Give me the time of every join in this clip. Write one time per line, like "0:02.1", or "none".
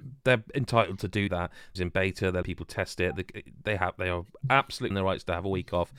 0:01.3
0:01.8
0:02.4
0:04.9